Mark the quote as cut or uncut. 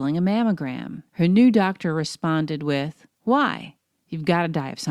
cut